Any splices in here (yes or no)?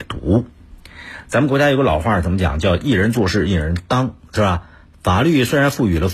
no